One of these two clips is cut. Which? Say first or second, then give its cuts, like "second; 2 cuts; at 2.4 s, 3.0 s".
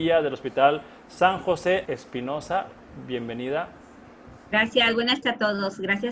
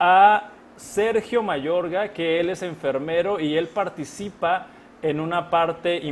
first; 2 cuts; at 1.9 s, 5.2 s